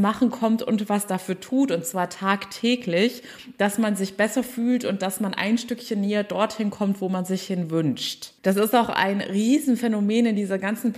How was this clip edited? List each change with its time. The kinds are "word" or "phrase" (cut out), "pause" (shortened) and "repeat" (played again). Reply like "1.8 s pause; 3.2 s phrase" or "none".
8.4 s pause

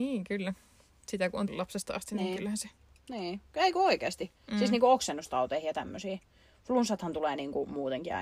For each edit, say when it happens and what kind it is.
1.5 s word

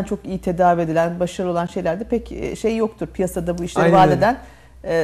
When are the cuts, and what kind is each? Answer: none

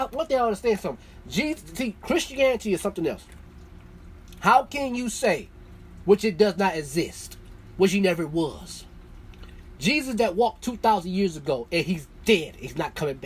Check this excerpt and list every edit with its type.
none

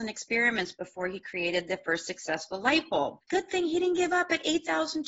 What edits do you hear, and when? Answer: 3.2 s pause

